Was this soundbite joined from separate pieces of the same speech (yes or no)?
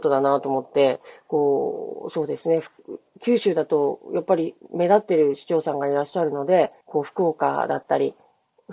yes